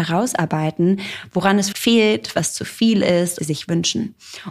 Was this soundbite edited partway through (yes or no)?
yes